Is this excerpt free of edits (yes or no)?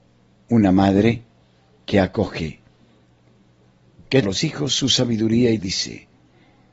no